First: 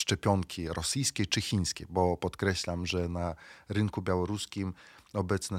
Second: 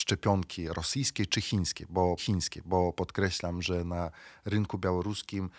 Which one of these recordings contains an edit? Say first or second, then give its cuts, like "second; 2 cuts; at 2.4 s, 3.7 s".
second; 1 cut; at 2.2 s